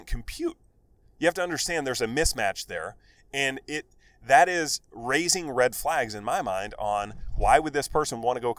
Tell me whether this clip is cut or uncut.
uncut